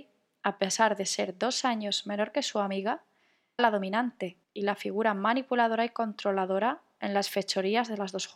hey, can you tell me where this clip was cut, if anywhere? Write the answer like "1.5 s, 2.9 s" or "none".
3.6 s, 4.4 s